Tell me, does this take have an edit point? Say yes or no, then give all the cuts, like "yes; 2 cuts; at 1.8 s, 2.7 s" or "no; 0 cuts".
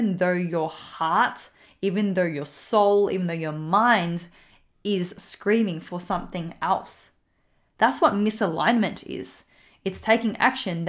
no; 0 cuts